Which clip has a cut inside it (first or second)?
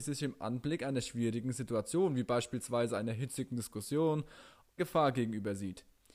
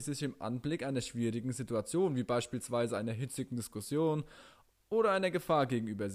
first